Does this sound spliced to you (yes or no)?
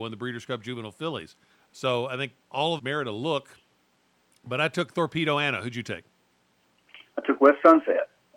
yes